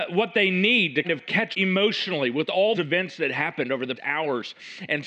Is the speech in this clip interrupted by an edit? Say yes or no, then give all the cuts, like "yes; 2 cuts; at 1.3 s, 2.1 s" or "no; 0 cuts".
yes; 4 cuts; at 1.0 s, 1.5 s, 2.7 s, 4.0 s